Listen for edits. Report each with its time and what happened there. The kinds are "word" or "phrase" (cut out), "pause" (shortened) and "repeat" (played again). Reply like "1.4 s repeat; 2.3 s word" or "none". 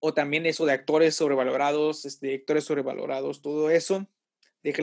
none